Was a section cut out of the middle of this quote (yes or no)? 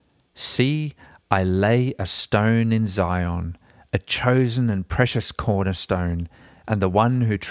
no